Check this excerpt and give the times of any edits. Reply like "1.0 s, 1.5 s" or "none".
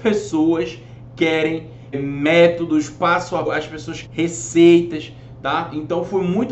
1.9 s, 3.4 s, 4.0 s